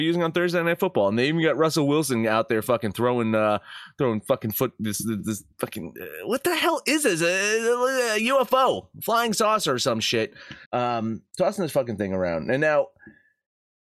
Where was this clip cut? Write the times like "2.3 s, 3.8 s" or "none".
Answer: 10.6 s